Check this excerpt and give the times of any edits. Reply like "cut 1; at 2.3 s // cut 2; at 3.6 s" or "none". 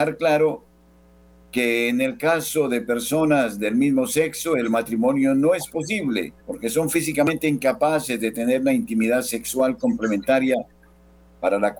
cut 1; at 6.4 s